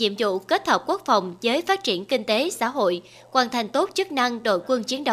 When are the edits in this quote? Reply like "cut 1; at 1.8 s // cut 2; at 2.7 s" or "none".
none